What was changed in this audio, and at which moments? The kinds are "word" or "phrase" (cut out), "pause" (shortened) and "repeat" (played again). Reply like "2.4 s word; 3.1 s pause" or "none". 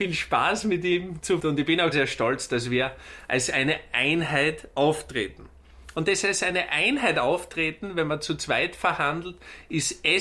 1.4 s phrase; 1.9 s word